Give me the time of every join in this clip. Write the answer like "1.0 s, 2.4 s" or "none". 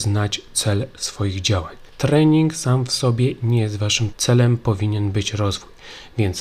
1.9 s, 4.1 s